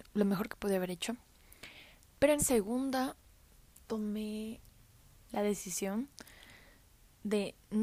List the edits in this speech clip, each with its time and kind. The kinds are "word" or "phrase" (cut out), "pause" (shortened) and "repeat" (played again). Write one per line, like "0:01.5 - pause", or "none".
0:02.4 - word
0:05.3 - word

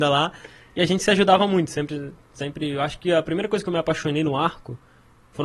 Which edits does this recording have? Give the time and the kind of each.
none

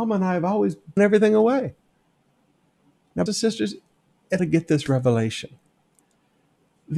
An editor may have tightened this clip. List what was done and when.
0:01.0 - word
0:03.3 - word
0:04.4 - phrase

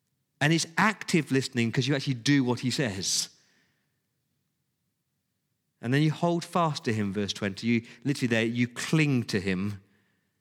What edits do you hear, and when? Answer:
none

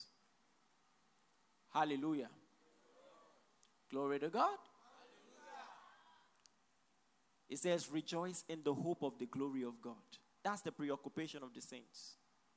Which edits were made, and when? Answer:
none

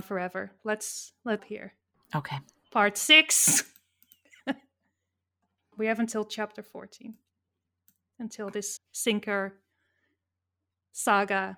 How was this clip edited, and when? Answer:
0:01.4 - word
0:05.7 - word
0:08.8 - word

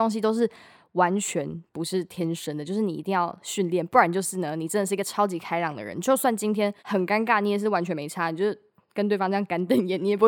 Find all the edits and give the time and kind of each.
0:06.8 - pause

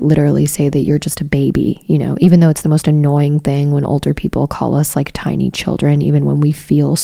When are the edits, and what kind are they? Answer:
none

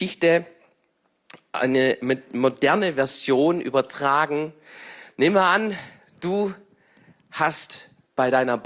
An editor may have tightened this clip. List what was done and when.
none

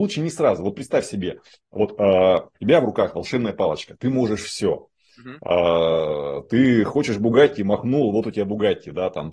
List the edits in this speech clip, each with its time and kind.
0:02.5 - pause

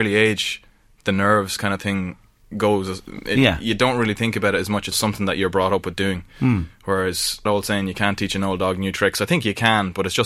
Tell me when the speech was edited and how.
0:04.9 - word
0:07.5 - word

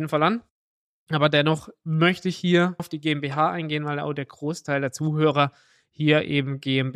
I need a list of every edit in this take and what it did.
0:02.8 - word

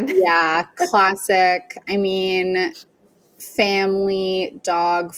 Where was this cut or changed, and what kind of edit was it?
none

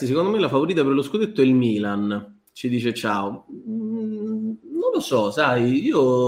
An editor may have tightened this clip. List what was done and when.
none

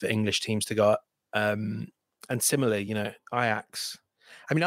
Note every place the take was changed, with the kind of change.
none

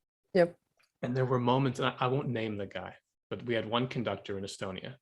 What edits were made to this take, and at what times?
none

